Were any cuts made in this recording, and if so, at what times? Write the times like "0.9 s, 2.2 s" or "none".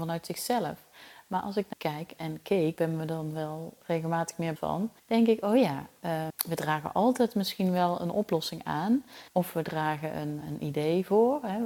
1.7 s, 2.8 s, 3.8 s, 4.6 s, 5.0 s, 6.3 s, 9.3 s, 10.4 s